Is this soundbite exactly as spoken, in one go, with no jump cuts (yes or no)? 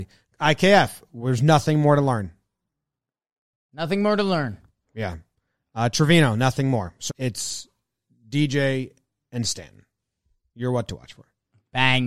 no